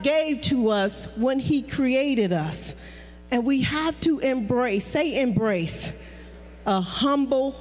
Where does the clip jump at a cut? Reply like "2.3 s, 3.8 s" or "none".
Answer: none